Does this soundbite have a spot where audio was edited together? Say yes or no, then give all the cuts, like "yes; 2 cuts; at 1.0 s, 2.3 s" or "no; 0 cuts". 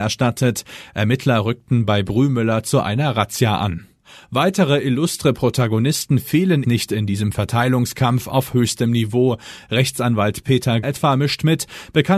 yes; 2 cuts; at 6.6 s, 10.8 s